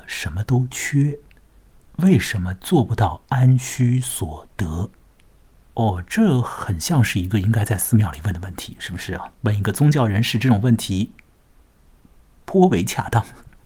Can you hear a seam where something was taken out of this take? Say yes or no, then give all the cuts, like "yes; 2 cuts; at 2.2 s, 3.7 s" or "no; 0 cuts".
yes; 2 cuts; at 4.9 s, 9.3 s